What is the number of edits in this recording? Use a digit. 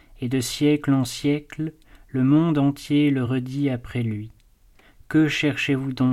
0